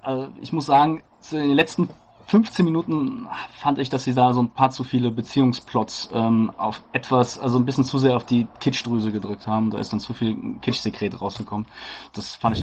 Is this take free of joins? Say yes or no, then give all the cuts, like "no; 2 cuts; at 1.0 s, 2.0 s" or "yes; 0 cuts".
yes; 0 cuts